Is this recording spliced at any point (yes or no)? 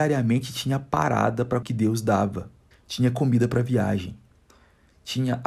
yes